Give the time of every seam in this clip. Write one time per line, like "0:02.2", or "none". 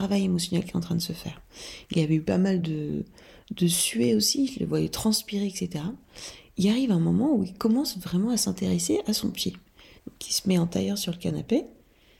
none